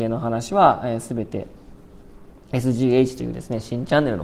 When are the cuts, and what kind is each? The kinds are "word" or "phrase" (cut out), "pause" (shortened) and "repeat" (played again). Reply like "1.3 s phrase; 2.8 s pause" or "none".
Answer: none